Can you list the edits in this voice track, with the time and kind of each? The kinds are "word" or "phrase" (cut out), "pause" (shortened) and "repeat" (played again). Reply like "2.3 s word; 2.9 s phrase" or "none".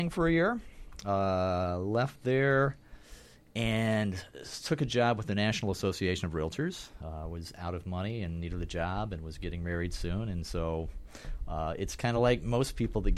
none